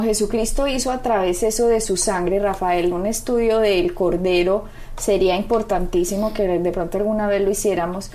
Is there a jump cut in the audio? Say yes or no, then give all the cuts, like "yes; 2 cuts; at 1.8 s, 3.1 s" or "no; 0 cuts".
no; 0 cuts